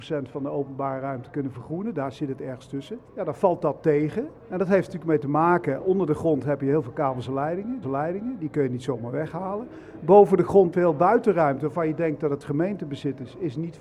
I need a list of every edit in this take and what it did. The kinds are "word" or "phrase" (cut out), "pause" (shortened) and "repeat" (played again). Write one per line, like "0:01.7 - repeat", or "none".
0:03.0 - pause
0:04.4 - pause
0:07.8 - repeat
0:10.7 - word